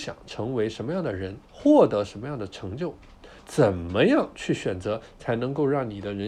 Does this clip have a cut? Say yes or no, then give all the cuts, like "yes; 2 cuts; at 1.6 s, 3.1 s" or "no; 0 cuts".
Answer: yes; 2 cuts; at 1.4 s, 3.4 s